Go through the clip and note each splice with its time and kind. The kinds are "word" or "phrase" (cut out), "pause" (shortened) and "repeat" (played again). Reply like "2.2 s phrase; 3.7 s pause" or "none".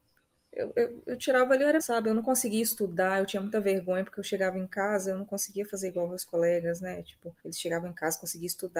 1.8 s word; 7.4 s pause